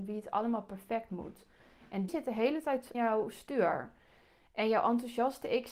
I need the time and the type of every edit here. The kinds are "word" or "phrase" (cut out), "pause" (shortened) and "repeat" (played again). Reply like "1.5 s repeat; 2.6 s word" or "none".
2.1 s word; 2.9 s word